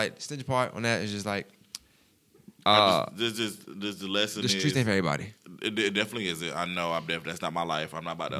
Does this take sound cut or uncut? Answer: uncut